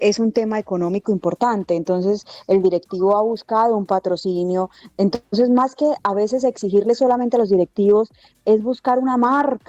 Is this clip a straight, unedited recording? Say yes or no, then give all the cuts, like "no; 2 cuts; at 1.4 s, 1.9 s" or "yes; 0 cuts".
yes; 0 cuts